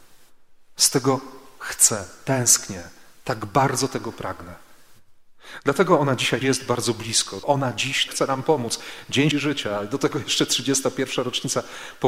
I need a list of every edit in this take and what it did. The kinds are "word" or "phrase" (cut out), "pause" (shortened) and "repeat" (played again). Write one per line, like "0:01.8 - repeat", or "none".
0:06.4 - word
0:07.4 - word
0:08.1 - word
0:09.3 - word